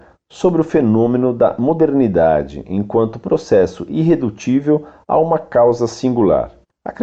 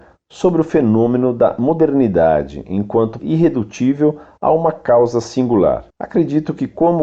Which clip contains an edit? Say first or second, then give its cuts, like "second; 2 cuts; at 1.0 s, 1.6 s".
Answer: second; 2 cuts; at 3.2 s, 5.9 s